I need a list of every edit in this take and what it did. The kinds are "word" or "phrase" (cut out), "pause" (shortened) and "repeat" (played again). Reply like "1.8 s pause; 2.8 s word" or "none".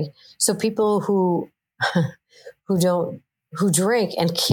none